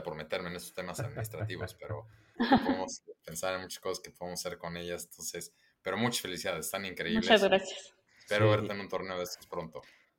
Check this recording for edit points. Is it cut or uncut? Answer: uncut